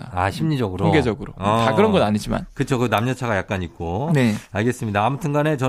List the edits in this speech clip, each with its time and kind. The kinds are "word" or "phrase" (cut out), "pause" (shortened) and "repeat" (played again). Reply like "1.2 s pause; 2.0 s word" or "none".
none

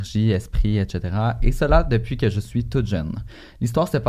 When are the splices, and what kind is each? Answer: none

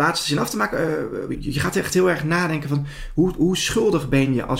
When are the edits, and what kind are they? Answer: 1.3 s word

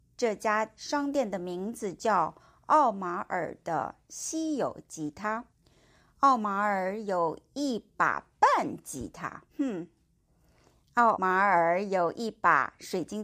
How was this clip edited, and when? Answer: 2.4 s pause; 5.5 s pause; 9.5 s pause; 11.1 s word

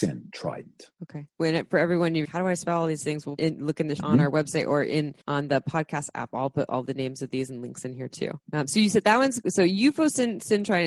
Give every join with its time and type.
0.9 s pause; 2.2 s word; 3.4 s phrase; 4.0 s phrase; 5.2 s pause; 8.4 s pause

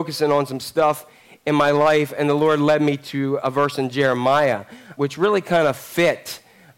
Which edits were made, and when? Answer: 3.4 s word; 5.0 s word

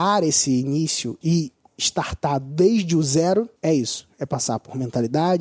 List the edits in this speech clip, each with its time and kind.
1.2 s word; 3.6 s pause

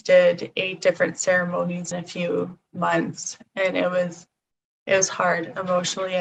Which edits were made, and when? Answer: 1.9 s word

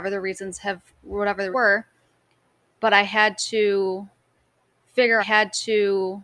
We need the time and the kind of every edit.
0.9 s pause; 1.5 s word; 5.2 s repeat

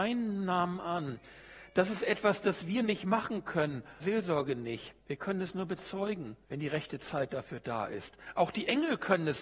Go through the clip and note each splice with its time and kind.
4.0 s phrase; 5.0 s pause; 6.4 s pause

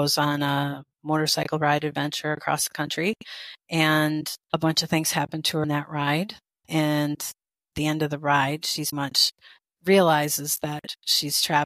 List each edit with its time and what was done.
0.9 s pause; 4.4 s pause; 5.6 s word; 7.7 s word; 8.9 s word; 9.6 s pause

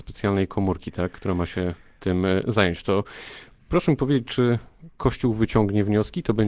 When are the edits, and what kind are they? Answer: none

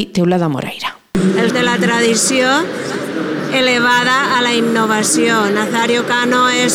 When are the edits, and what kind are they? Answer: 1.5 s word

